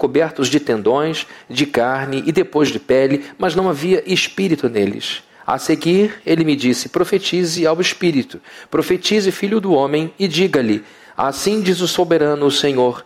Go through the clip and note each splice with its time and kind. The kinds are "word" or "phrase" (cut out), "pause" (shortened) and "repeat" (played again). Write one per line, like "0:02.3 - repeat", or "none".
none